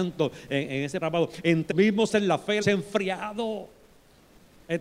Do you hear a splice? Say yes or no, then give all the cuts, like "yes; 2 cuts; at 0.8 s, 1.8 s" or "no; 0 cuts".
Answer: yes; 4 cuts; at 1.0 s, 1.7 s, 2.1 s, 2.6 s